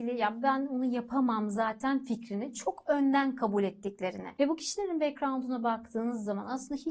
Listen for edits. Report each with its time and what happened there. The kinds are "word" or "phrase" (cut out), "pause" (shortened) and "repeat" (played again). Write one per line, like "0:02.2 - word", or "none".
none